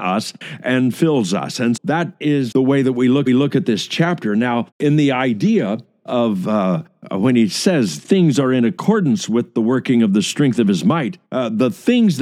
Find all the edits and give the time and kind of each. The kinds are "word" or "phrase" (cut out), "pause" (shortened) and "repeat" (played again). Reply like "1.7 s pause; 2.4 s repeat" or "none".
1.8 s word; 2.5 s word; 3.3 s repeat; 4.7 s pause; 8.0 s word; 11.3 s pause